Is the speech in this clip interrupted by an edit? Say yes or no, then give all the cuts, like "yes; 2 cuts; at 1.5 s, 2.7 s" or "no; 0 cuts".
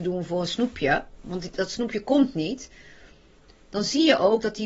no; 0 cuts